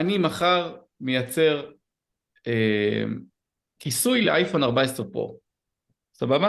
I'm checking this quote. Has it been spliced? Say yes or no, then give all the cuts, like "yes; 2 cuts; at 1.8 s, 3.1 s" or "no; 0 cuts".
no; 0 cuts